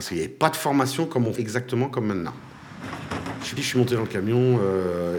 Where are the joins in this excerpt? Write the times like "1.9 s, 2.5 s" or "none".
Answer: 1.4 s, 3.6 s